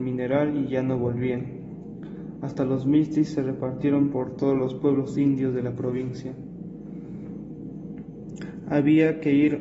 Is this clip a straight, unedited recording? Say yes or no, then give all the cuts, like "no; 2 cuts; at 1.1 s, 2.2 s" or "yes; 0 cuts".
yes; 0 cuts